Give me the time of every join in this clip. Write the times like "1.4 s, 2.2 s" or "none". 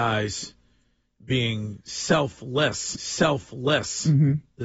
2.9 s